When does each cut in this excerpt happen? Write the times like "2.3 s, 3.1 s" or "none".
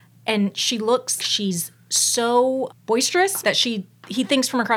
1.2 s, 2.7 s, 3.4 s

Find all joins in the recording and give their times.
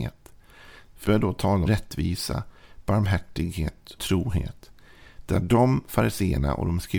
1.0 s, 1.7 s, 4.0 s

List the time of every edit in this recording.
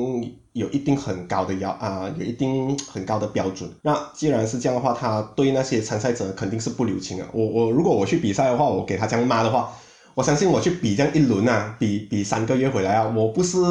3.8 s

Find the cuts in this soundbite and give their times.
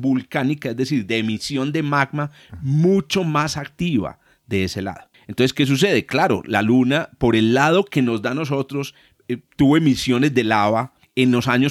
none

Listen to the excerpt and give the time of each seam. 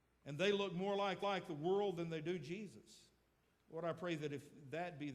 1.2 s, 3.3 s

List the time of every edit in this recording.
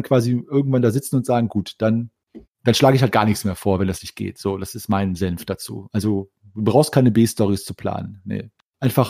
2.4 s

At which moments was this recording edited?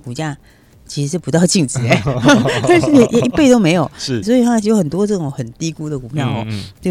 4.2 s

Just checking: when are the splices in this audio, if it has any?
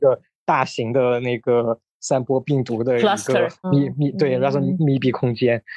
3.6 s

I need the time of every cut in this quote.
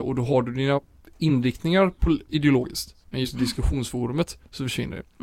3.0 s

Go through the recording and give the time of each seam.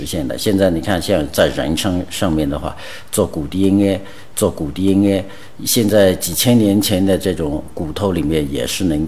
4.3 s

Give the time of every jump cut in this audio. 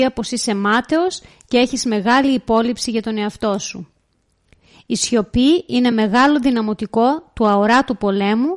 none

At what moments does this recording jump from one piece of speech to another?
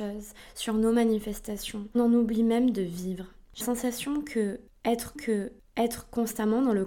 1.9 s, 3.6 s, 5.1 s

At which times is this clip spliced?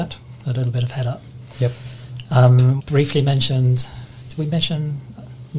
2.8 s

